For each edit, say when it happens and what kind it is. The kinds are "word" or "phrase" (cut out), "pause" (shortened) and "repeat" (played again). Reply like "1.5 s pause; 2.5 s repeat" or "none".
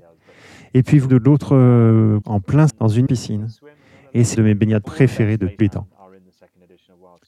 1.1 s word; 2.2 s word; 2.7 s word; 3.1 s word; 4.4 s word; 4.8 s word; 5.6 s word